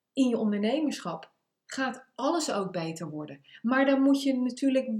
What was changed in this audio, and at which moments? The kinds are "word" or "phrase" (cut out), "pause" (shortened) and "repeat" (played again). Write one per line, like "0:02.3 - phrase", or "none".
none